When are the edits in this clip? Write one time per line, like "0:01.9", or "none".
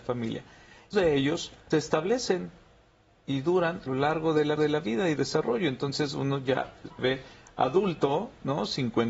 0:00.9
0:01.7
0:03.9
0:04.6
0:05.2
0:07.0